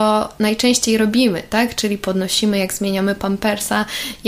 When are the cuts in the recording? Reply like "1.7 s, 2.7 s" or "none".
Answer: none